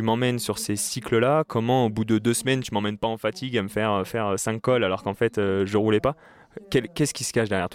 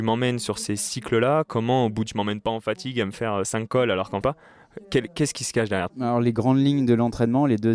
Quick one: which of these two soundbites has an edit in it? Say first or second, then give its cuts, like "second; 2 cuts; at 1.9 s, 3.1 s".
second; 4 cuts; at 2.1 s, 3.1 s, 4.2 s, 5.9 s